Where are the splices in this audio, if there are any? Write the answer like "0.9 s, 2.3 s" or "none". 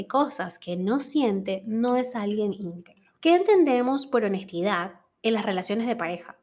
3.2 s